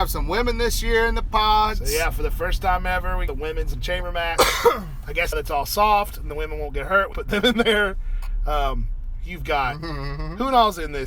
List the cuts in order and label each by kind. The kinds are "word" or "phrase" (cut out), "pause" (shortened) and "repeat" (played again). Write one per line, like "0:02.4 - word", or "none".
0:03.3 - word
0:03.7 - word
0:05.3 - word
0:07.1 - word